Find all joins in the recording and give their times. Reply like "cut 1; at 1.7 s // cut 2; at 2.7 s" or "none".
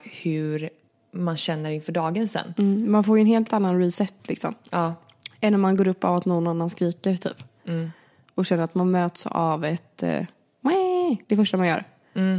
cut 1; at 11.2 s